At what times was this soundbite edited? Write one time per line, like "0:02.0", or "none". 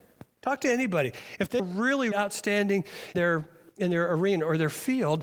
0:01.6
0:02.1
0:03.1